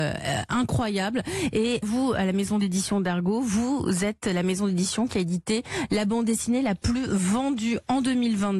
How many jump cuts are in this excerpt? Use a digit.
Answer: 1